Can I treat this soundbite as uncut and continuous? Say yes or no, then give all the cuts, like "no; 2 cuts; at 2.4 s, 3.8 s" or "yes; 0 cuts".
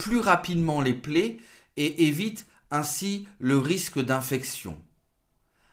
yes; 0 cuts